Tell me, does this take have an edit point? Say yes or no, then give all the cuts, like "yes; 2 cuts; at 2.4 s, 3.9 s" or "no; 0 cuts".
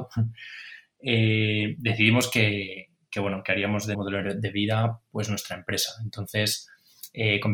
yes; 1 cut; at 3.9 s